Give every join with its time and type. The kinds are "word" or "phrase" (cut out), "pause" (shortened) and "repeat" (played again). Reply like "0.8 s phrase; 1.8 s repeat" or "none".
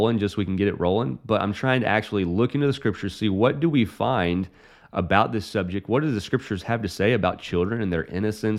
none